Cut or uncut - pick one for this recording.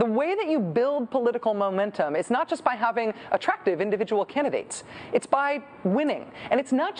uncut